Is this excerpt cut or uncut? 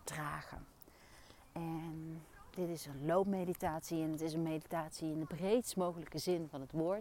uncut